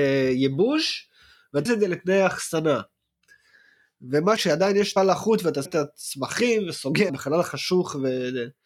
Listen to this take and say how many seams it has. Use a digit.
5